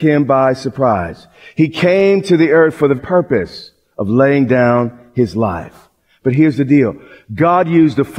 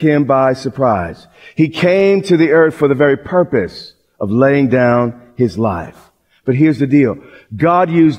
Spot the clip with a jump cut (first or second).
first